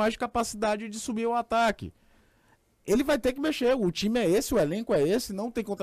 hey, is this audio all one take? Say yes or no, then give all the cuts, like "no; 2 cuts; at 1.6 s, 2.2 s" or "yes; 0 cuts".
yes; 0 cuts